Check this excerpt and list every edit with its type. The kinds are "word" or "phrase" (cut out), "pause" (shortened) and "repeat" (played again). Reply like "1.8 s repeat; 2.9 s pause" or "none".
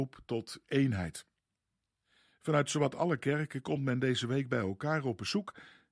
none